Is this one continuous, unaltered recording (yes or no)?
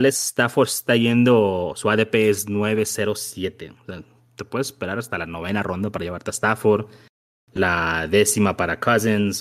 yes